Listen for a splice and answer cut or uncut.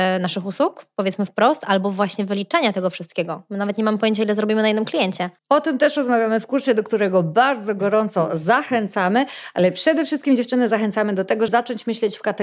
cut